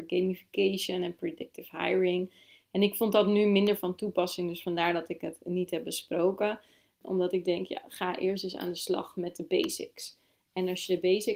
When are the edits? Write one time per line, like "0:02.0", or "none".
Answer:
none